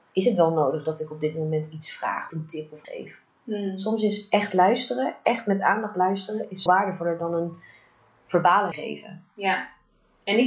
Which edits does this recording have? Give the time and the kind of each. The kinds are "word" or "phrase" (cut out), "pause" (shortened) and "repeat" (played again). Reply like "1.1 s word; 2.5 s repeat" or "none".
2.3 s word; 2.8 s word; 6.7 s word; 8.7 s word